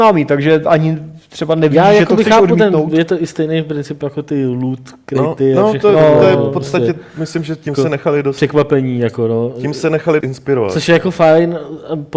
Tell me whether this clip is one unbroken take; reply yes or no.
no